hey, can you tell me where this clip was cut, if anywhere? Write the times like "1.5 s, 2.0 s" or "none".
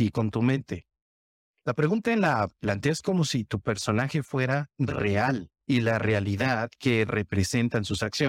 5.6 s